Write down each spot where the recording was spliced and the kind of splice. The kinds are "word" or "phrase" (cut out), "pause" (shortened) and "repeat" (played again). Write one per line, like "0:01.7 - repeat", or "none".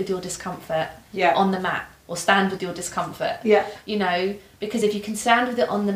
none